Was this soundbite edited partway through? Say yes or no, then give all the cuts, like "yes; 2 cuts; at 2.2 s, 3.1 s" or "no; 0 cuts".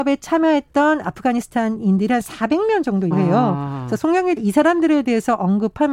yes; 2 cuts; at 3.1 s, 4.4 s